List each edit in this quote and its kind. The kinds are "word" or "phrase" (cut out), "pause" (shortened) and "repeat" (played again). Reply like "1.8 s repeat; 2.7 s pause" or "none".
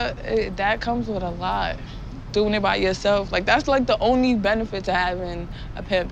none